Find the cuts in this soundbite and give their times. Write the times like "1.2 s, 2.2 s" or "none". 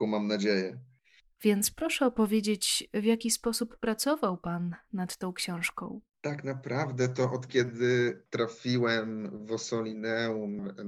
none